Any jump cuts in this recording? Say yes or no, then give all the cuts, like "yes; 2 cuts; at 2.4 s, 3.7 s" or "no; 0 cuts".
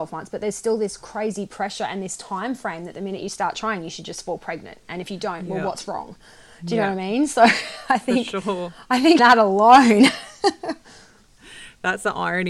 yes; 1 cut; at 9.2 s